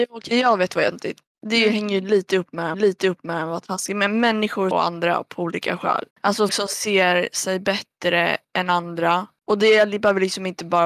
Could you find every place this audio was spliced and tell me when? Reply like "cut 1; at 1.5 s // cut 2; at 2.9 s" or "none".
cut 1; at 0.9 s // cut 2; at 2.7 s // cut 3; at 4.7 s // cut 4; at 6.1 s // cut 5; at 6.5 s